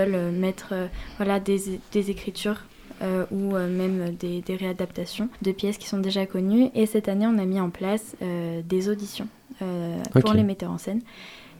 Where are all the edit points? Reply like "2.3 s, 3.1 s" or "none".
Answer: 5.3 s